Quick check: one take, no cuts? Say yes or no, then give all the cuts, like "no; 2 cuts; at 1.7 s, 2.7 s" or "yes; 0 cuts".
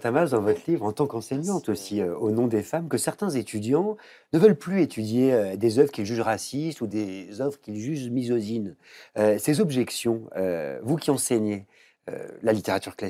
yes; 0 cuts